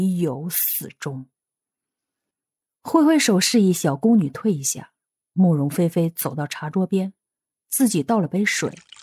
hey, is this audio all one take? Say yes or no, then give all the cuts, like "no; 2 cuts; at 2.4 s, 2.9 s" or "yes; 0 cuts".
yes; 0 cuts